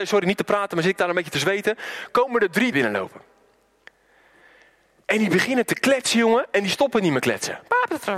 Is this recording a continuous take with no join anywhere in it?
no; 1 cut; at 2.7 s

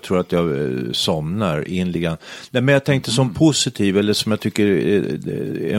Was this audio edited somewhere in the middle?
yes; 1 cut; at 1.9 s

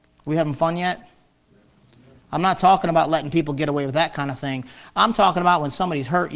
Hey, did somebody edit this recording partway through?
no; 0 cuts

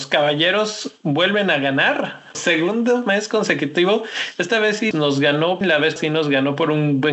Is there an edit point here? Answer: yes; 4 cuts; at 2.3 s, 4.9 s, 5.6 s, 6.0 s

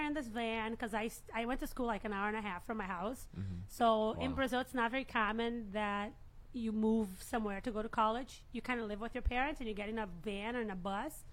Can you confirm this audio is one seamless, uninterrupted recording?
yes; 0 cuts

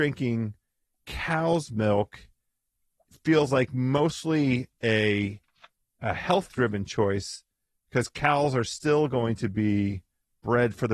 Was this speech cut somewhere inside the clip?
no; 0 cuts

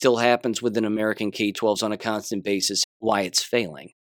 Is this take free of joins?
no; 2 cuts; at 1.8 s, 2.8 s

